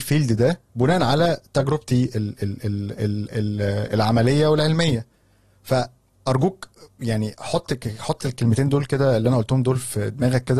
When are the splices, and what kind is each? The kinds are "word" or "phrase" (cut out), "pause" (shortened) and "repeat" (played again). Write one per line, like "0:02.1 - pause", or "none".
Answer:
none